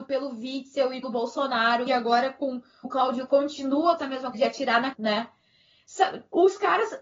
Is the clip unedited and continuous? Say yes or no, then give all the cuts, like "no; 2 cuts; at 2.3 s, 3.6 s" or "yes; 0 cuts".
no; 7 cuts; at 1.0 s, 1.9 s, 2.8 s, 3.3 s, 4.0 s, 4.3 s, 4.9 s